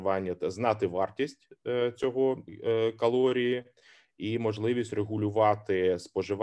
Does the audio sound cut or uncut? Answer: uncut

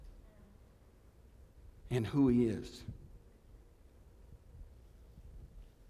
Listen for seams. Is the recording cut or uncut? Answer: uncut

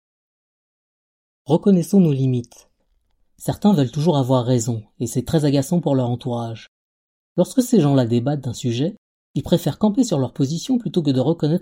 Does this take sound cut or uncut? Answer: uncut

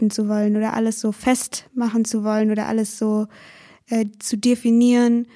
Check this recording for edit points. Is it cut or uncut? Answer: uncut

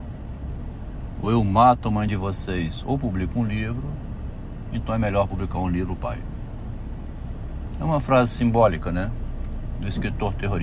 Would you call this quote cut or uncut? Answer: uncut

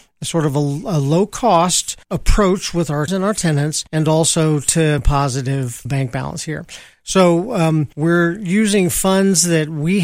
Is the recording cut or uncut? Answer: cut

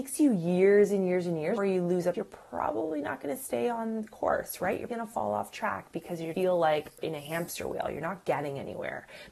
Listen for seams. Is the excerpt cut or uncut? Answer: cut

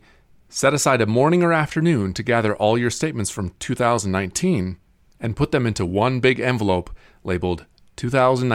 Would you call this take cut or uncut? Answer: uncut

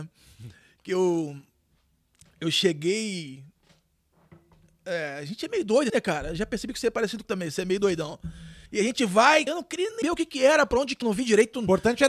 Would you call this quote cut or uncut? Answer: cut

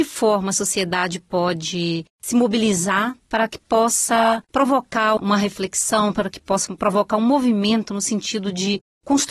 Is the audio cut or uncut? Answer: uncut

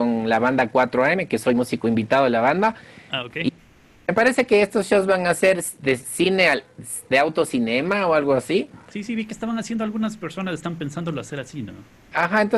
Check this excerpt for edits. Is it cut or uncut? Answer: uncut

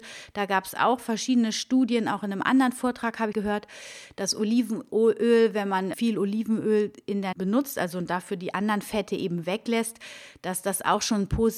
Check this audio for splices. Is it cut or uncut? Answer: cut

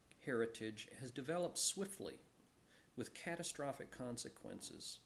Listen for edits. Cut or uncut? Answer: uncut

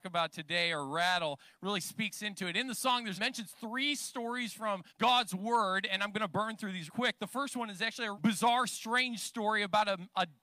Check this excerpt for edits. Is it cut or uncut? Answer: cut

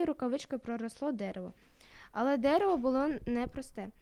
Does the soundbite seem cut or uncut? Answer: uncut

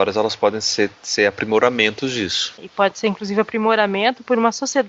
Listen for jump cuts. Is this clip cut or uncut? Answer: uncut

